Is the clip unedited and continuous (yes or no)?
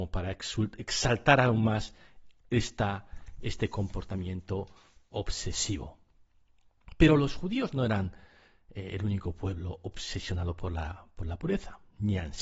yes